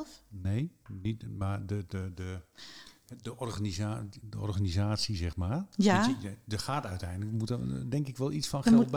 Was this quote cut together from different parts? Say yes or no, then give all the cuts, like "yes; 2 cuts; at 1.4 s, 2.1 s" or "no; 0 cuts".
no; 0 cuts